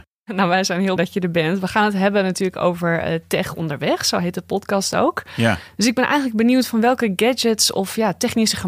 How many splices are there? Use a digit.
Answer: 1